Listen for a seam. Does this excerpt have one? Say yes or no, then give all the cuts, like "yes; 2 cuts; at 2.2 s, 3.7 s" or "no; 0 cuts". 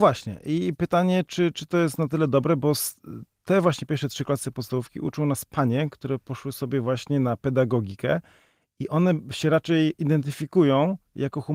no; 0 cuts